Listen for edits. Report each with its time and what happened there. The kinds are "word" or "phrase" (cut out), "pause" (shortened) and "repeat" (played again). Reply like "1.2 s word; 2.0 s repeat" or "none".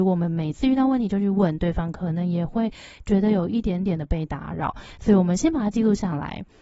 none